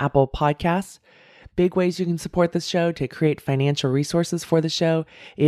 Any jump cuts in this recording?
no; 0 cuts

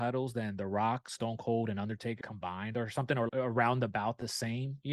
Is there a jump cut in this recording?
yes; 2 cuts; at 2.2 s, 3.3 s

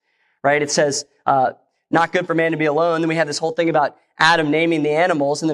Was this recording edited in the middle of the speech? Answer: no; 0 cuts

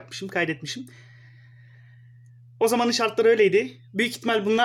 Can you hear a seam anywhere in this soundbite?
no; 0 cuts

